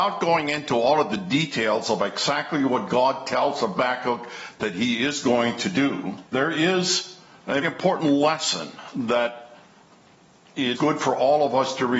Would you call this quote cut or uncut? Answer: cut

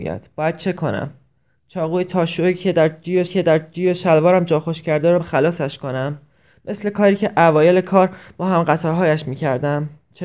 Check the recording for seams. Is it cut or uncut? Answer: cut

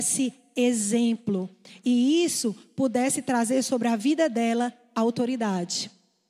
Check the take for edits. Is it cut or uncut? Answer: uncut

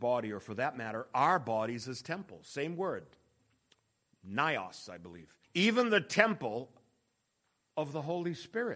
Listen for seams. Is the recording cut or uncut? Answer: cut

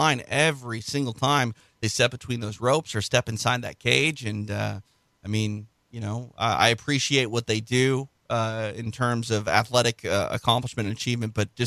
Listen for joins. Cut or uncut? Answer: uncut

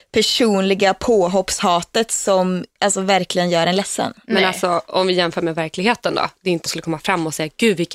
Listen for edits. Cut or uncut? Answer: cut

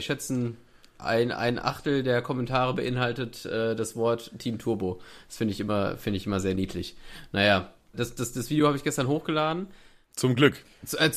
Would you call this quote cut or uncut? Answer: uncut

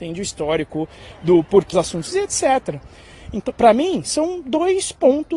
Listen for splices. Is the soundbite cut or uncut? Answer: cut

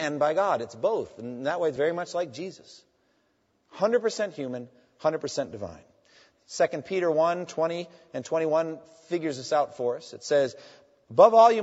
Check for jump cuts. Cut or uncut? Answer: uncut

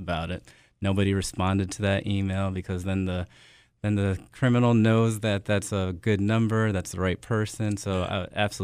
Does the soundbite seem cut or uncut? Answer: uncut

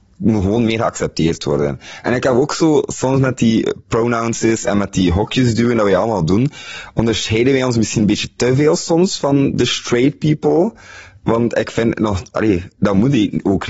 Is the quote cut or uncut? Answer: uncut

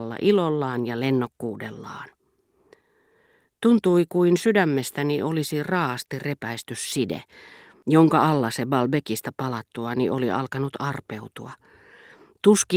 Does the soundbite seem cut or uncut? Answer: uncut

